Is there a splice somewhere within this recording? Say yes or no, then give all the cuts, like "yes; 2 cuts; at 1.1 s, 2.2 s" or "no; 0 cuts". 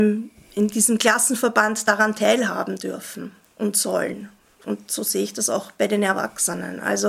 no; 0 cuts